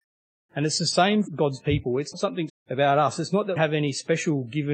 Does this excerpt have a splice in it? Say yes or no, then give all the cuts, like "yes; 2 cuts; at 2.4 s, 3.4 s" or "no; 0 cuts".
yes; 4 cuts; at 1.3 s, 2.1 s, 2.5 s, 3.6 s